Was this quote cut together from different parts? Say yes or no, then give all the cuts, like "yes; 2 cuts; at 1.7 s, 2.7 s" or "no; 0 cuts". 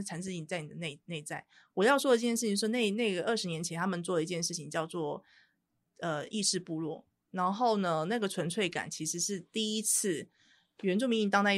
no; 0 cuts